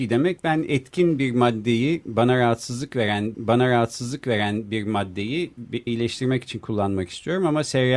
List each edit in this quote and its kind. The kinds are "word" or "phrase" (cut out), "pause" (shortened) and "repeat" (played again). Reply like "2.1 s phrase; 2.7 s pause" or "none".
3.3 s repeat; 5.9 s word